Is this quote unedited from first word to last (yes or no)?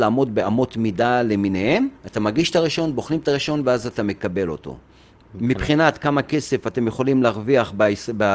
no